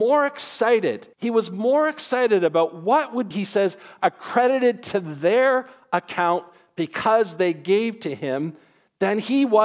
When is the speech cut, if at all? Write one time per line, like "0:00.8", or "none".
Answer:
0:01.1
0:03.3